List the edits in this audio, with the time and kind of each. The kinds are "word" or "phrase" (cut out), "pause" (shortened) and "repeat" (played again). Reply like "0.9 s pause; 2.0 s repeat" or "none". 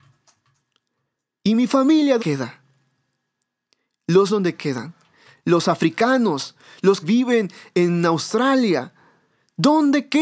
2.2 s word; 4.3 s word; 7.0 s word

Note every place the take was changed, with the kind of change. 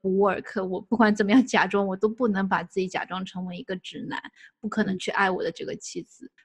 none

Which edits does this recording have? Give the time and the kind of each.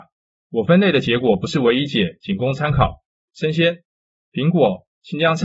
none

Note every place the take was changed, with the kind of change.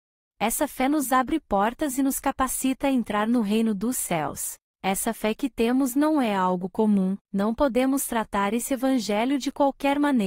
4.6 s pause; 7.2 s pause

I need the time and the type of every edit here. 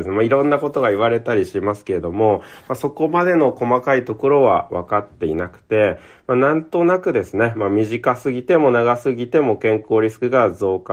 none

